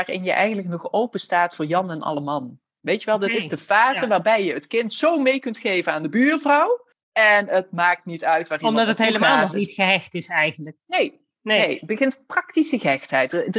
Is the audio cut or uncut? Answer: cut